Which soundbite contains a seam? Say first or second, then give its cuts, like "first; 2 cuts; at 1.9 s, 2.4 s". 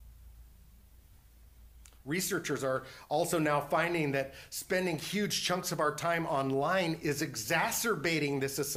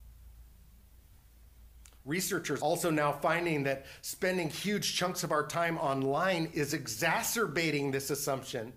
second; 1 cut; at 2.6 s